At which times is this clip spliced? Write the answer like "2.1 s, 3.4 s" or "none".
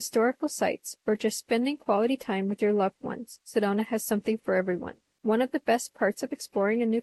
none